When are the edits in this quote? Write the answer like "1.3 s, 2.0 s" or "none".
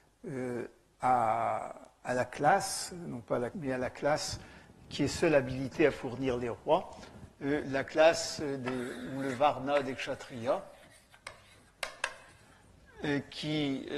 3.5 s